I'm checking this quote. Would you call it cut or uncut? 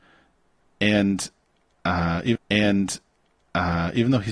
cut